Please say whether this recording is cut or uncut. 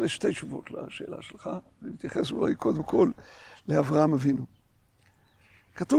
uncut